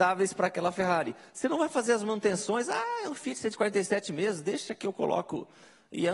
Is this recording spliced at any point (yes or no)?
no